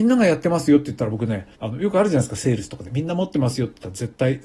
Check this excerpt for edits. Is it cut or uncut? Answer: cut